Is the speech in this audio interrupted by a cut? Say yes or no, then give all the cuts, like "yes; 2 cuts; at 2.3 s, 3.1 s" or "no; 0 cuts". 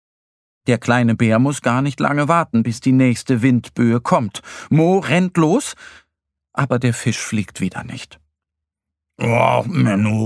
no; 0 cuts